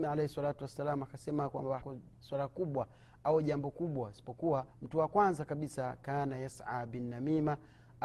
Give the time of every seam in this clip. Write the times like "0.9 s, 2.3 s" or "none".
1.8 s, 4.7 s